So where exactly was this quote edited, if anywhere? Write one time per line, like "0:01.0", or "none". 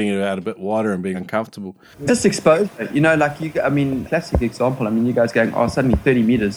0:01.1
0:02.1
0:04.0